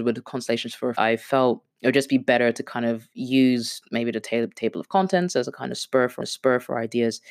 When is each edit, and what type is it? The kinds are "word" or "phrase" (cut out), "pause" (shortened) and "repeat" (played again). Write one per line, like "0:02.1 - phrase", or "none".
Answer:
0:01.0 - phrase
0:01.7 - pause
0:06.2 - repeat